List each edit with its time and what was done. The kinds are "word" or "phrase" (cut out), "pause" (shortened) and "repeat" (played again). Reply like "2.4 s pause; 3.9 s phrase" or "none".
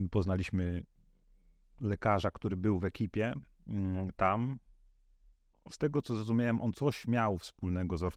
none